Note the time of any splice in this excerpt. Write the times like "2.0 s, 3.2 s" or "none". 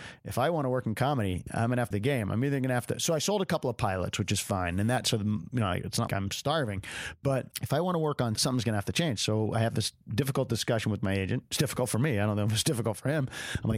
1.9 s, 6.1 s, 7.5 s, 8.3 s